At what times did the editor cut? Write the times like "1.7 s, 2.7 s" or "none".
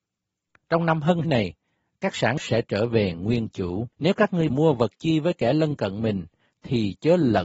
1.2 s, 2.4 s, 3.9 s, 4.5 s

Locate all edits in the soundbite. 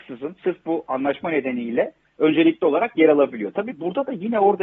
none

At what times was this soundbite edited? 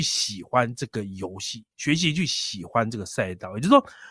1.7 s

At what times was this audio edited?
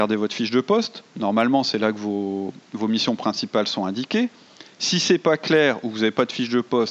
none

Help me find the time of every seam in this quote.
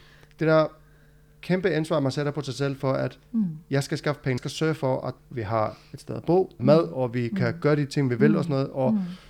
4.4 s, 5.2 s, 6.6 s

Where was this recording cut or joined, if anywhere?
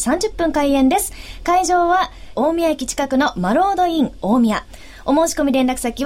2.3 s

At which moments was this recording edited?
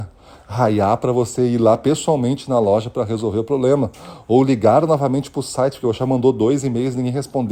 none

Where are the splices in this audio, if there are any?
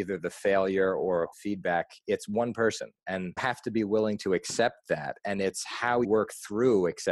1.3 s, 3.4 s, 6.0 s

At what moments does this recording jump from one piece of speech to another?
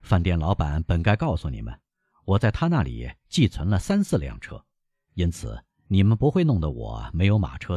none

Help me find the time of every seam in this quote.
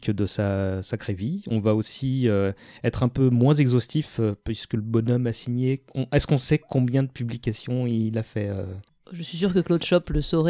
none

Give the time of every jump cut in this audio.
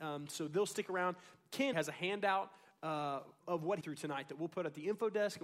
1.7 s, 3.4 s, 3.8 s

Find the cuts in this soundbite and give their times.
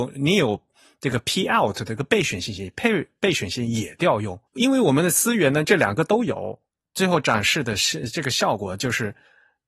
4.5 s

